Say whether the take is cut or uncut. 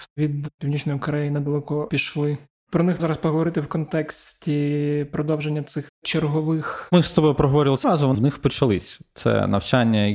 cut